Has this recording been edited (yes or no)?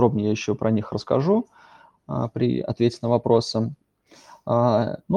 no